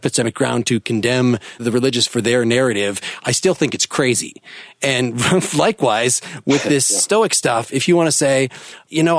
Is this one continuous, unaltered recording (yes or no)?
yes